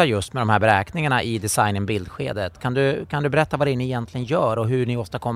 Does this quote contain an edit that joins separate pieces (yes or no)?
no